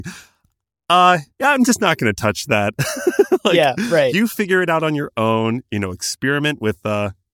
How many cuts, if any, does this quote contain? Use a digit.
1